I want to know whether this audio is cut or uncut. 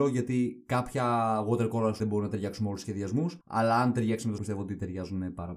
cut